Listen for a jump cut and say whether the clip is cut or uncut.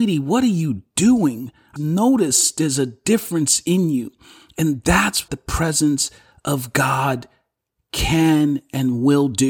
cut